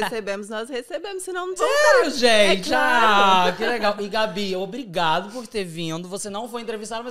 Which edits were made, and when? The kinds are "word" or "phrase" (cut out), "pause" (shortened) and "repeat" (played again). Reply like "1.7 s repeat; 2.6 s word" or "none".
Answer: 1.6 s word